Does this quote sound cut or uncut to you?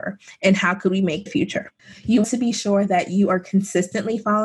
cut